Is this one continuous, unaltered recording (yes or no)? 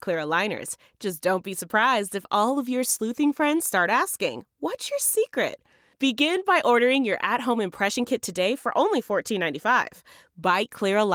yes